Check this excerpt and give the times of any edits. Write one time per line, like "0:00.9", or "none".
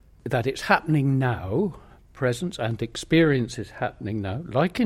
none